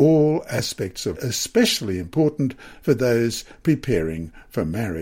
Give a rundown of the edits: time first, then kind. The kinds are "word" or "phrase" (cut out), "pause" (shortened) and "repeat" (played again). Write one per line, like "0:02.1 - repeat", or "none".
0:01.1 - phrase